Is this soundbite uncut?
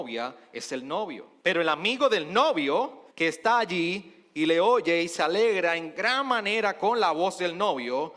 no; 2 cuts; at 1.4 s, 3.1 s

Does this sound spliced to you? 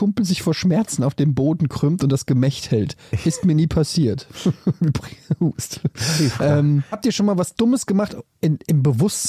yes; 1 cut; at 6.9 s

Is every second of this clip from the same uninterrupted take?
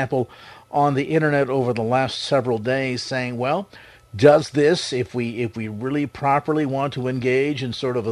yes; 0 cuts

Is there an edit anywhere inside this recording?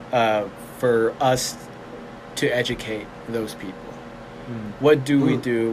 no; 0 cuts

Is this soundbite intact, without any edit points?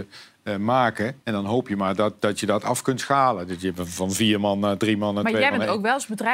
no; 1 cut; at 1.2 s

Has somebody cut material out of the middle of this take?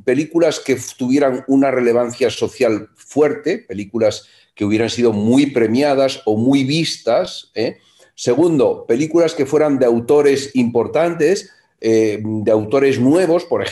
no; 0 cuts

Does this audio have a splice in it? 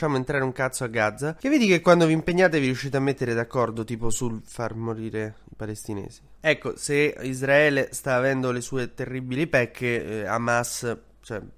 no; 0 cuts

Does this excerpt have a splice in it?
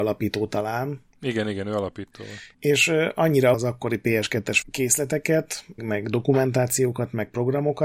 yes; 5 cuts; at 1.1 s, 2.5 s, 3.5 s, 4.6 s, 5.8 s

